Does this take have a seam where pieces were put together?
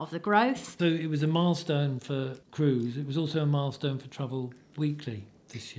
yes; 1 cut; at 2.4 s

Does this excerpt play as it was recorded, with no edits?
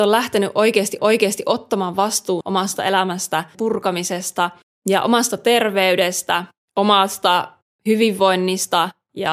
no; 5 cuts; at 1.0 s, 2.4 s, 3.5 s, 4.6 s, 6.6 s

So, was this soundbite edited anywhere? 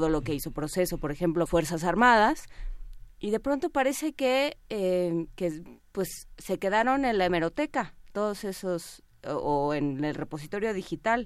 yes; 1 cut; at 1.5 s

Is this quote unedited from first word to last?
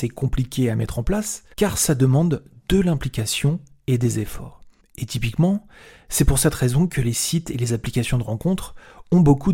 yes; 0 cuts

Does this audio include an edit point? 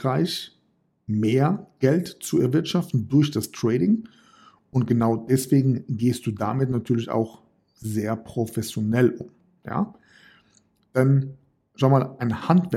no; 0 cuts

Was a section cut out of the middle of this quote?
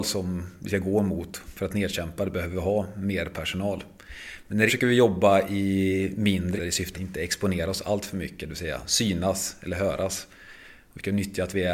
yes; 3 cuts; at 4.7 s, 6.6 s, 6.9 s

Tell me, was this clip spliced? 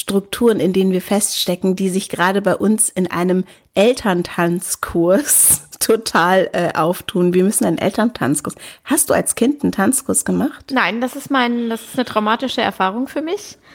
no; 0 cuts

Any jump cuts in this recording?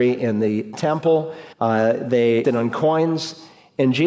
yes; 2 cuts; at 1.5 s, 2.4 s

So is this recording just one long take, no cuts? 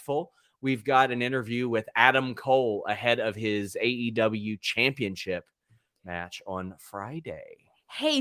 yes; 0 cuts

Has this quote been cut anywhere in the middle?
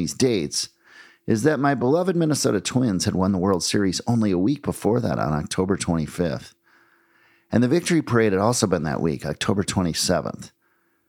no; 0 cuts

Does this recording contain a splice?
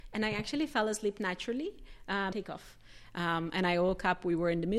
yes; 1 cut; at 2.3 s

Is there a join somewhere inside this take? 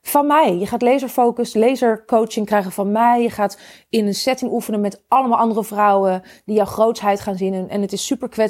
no; 0 cuts

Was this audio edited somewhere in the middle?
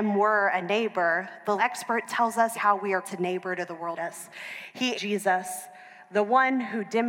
yes; 5 cuts; at 1.6 s, 2.5 s, 3.0 s, 4.0 s, 4.9 s

